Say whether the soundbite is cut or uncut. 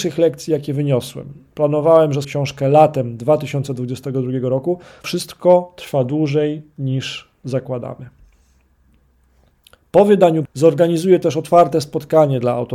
cut